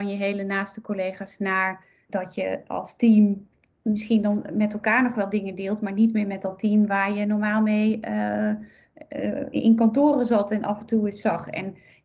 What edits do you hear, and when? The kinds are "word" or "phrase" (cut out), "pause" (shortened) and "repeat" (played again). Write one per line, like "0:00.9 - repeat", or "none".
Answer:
0:02.1 - word